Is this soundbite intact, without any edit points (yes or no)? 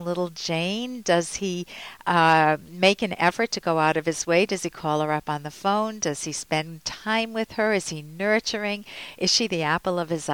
yes